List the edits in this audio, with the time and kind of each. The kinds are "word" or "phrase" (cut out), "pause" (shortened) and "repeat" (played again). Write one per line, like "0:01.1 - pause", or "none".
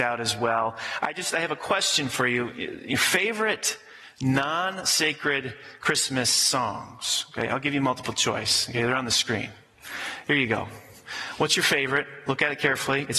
none